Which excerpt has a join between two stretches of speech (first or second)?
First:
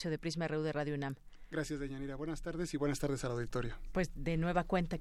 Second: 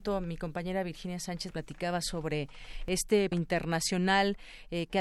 second